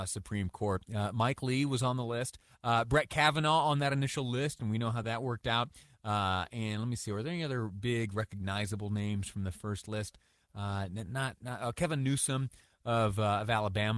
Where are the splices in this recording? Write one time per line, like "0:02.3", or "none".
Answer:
none